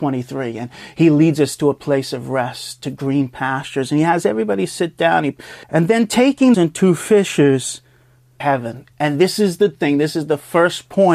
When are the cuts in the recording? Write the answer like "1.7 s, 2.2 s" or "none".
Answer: 5.6 s, 6.5 s, 8.4 s